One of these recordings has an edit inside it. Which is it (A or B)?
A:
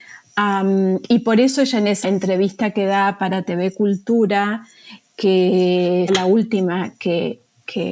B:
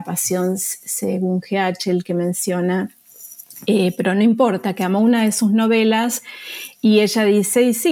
A